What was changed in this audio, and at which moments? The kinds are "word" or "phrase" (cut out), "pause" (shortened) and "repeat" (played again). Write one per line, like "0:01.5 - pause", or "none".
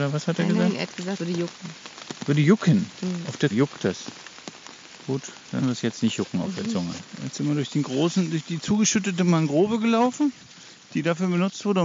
0:01.2 - word
0:03.5 - word
0:05.6 - word